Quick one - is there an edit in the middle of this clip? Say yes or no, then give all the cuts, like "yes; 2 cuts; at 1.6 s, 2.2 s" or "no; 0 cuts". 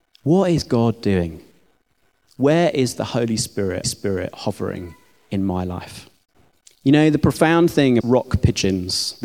yes; 3 cuts; at 3.8 s, 6.3 s, 8.0 s